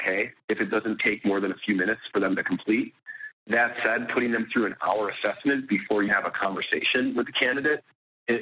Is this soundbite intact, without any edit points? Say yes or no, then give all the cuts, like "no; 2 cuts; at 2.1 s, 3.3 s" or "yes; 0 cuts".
no; 1 cut; at 6.1 s